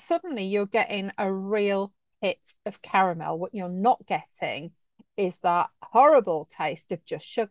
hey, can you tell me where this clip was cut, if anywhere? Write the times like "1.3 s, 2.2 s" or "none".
none